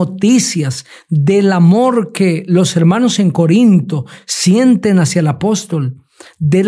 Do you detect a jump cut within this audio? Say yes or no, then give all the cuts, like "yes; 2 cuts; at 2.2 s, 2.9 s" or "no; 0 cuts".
no; 0 cuts